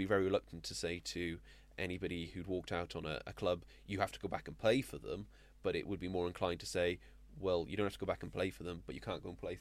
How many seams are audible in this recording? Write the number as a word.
zero